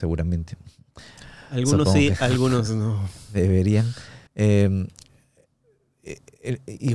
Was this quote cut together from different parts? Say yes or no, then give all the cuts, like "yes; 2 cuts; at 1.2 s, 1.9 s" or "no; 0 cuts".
yes; 1 cut; at 4.3 s